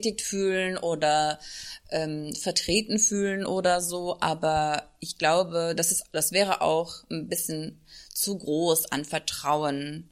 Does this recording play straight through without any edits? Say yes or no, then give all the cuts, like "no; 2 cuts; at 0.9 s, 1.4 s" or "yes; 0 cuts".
yes; 0 cuts